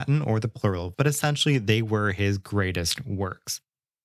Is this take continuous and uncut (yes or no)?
no